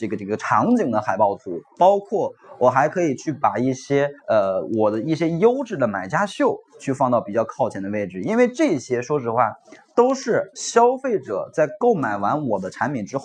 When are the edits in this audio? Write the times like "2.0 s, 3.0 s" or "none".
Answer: 4.2 s